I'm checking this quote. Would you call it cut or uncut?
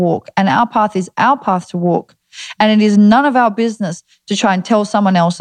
uncut